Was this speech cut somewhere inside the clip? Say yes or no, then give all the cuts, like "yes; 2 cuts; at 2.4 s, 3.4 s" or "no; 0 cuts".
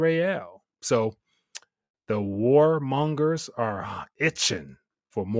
no; 0 cuts